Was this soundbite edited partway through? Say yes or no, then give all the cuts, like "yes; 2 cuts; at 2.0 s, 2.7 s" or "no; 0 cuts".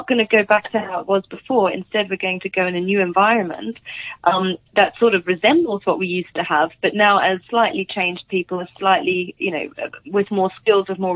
yes; 2 cuts; at 7.4 s, 10.0 s